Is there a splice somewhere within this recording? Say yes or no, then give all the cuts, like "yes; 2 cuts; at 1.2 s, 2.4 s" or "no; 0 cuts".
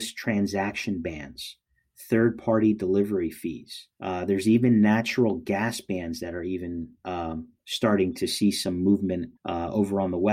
yes; 2 cuts; at 3.9 s, 9.4 s